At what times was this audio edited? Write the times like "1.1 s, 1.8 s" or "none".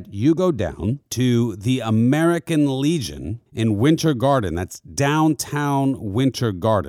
1.1 s, 3.5 s